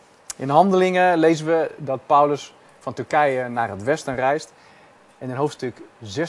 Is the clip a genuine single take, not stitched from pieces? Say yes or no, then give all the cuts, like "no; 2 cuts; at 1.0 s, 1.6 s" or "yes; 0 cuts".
yes; 0 cuts